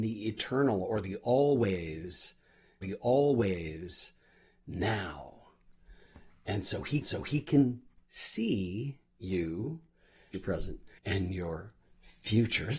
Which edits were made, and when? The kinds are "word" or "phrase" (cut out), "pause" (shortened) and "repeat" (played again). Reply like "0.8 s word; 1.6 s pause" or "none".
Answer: 2.8 s repeat; 7.0 s repeat; 10.3 s phrase; 11.0 s pause